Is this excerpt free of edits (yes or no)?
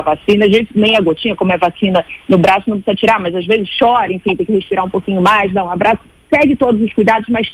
yes